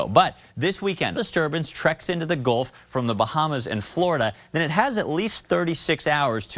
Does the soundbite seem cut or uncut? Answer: cut